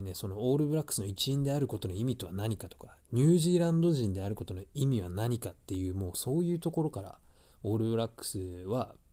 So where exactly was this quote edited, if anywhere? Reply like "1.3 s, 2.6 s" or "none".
none